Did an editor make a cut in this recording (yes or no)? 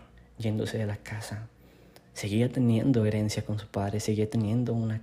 no